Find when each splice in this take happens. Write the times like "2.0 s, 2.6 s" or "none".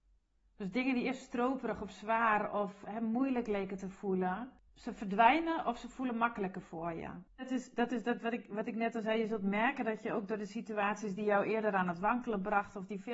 4.7 s, 7.3 s